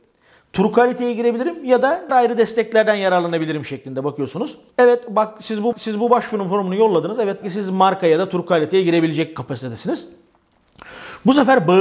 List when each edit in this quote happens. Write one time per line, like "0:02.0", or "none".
0:02.1
0:05.7
0:07.4

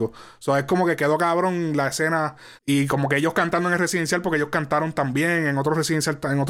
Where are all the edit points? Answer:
0:02.6

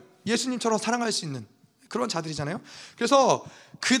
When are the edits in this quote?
none

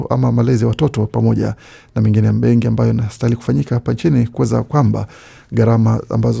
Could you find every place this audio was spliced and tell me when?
0:04.7

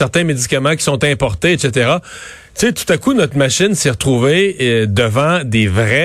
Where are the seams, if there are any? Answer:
none

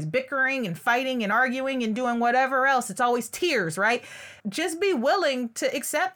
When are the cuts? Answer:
0:04.4

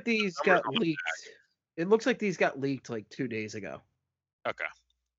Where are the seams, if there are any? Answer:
none

